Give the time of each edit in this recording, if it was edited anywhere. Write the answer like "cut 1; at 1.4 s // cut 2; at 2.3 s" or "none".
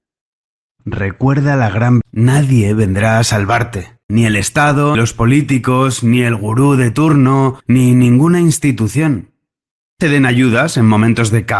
cut 1; at 2.0 s // cut 2; at 4.0 s // cut 3; at 4.9 s // cut 4; at 7.6 s // cut 5; at 10.0 s